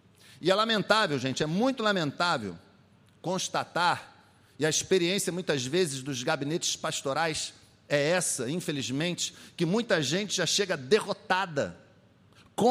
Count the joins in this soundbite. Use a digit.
0